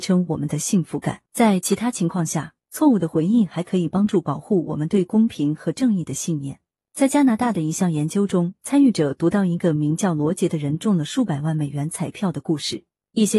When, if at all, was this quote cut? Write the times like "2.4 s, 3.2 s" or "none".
1.3 s